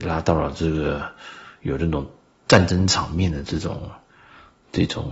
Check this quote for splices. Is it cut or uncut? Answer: uncut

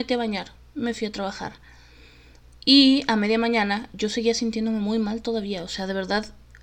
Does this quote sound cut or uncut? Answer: uncut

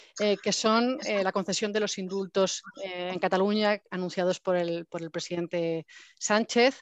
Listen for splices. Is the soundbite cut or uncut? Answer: cut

